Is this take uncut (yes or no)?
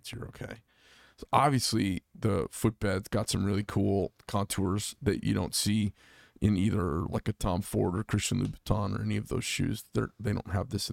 yes